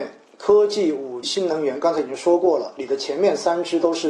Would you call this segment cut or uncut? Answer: cut